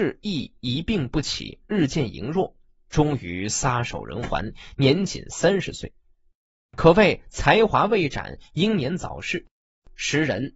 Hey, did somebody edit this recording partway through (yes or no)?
no